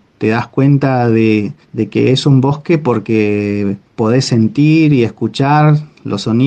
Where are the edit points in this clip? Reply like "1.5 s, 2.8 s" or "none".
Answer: 1.6 s, 3.9 s